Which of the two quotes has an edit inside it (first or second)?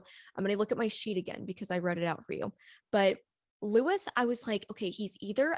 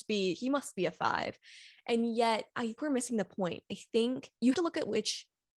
second